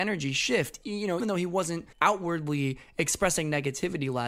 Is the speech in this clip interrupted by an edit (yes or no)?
yes